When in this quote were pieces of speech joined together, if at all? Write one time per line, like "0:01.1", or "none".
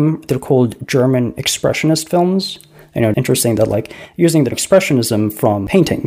0:03.1
0:04.5